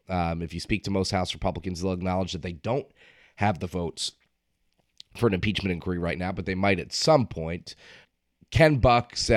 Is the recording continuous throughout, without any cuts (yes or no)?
yes